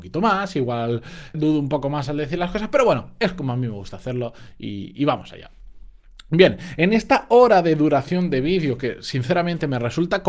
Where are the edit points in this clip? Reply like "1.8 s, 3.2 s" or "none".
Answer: 1.3 s